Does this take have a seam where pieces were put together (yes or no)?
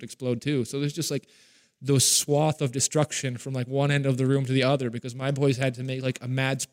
no